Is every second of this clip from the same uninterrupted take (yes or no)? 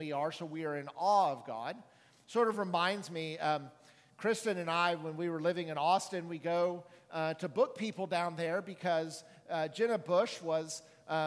yes